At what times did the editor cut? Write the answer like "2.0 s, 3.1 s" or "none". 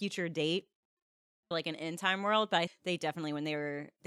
1.5 s, 2.7 s